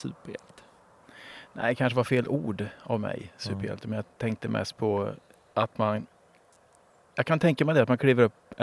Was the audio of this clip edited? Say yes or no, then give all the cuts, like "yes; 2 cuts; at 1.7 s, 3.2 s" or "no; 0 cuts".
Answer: no; 0 cuts